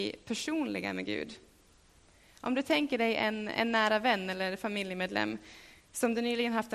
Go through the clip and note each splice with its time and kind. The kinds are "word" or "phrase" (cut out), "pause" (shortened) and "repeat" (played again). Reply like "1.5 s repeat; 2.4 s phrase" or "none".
none